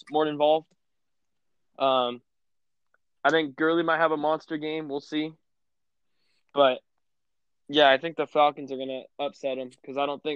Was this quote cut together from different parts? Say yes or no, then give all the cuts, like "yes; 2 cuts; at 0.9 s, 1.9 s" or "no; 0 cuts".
no; 0 cuts